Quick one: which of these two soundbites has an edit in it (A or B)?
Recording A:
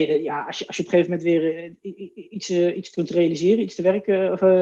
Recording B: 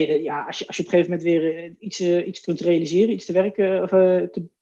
B